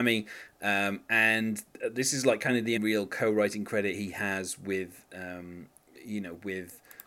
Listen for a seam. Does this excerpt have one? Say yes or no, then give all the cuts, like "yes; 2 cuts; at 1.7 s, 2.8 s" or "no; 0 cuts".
yes; 1 cut; at 2.8 s